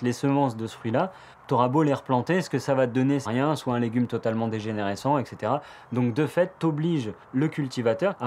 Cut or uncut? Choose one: cut